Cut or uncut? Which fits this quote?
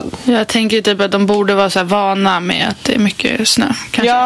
uncut